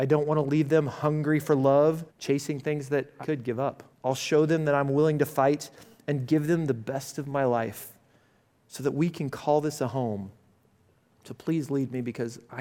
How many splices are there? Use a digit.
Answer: 3